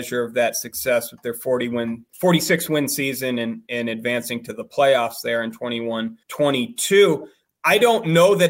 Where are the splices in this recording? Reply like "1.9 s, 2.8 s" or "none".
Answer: 2.1 s, 6.2 s